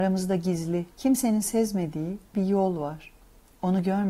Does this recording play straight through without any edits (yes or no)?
no